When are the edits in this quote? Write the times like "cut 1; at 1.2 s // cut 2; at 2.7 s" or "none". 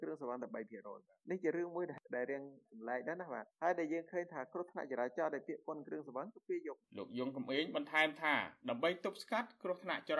cut 1; at 3.5 s